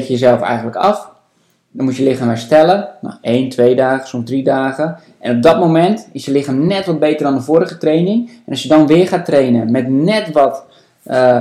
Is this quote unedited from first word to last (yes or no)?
yes